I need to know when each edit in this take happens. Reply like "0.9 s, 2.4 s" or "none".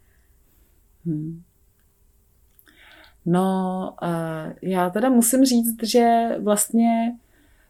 none